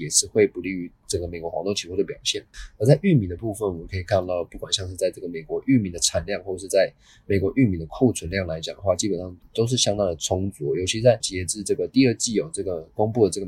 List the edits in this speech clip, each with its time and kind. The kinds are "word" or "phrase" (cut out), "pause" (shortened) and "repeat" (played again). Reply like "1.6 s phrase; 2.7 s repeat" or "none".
11.2 s word